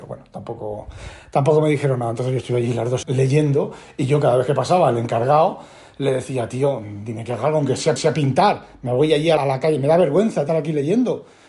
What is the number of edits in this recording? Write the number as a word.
four